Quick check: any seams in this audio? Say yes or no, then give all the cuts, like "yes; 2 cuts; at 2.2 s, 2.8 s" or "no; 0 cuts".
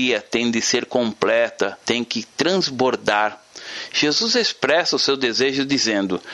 yes; 1 cut; at 1.8 s